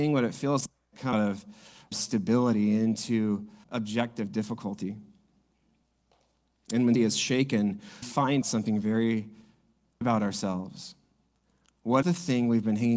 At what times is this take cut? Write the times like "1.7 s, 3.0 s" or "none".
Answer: 1.1 s, 1.9 s, 3.6 s, 6.9 s, 8.0 s, 8.4 s, 10.0 s, 12.0 s